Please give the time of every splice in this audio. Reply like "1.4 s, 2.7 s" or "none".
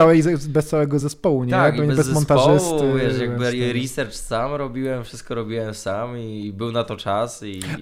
none